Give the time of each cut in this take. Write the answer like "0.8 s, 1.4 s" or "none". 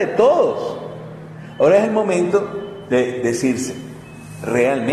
none